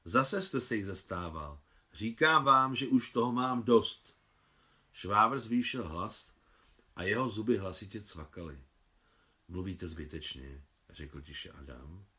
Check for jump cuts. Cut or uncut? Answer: uncut